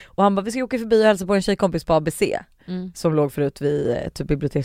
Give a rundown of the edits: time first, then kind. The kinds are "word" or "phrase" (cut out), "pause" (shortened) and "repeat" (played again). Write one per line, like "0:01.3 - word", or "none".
none